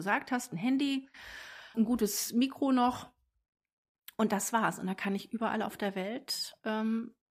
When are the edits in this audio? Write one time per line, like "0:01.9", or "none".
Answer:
0:01.7